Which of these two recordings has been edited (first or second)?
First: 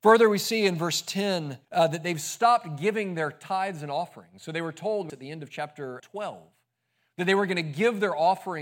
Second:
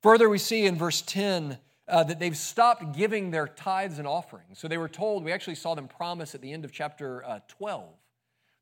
first